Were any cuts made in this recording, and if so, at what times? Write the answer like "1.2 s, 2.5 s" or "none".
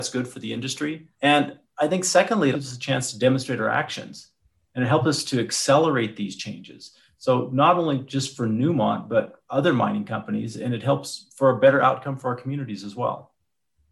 1.1 s, 2.5 s